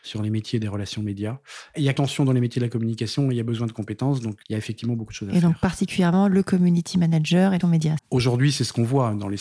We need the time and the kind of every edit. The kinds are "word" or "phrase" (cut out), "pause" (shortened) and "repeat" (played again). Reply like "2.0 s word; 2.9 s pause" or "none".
2.0 s word; 4.4 s word; 7.6 s word; 8.0 s phrase